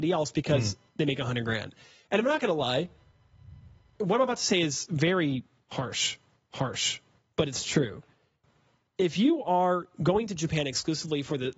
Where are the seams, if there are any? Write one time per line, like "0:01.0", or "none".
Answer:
0:06.5